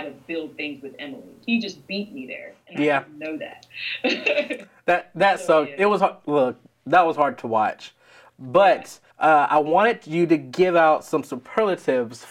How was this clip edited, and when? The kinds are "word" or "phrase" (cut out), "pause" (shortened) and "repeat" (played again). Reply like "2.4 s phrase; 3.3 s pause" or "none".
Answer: 9.1 s pause